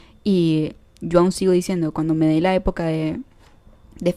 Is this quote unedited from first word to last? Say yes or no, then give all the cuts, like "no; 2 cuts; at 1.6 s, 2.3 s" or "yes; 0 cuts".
yes; 0 cuts